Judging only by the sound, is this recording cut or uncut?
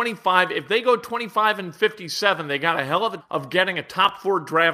cut